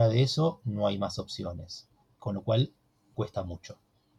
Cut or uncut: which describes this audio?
cut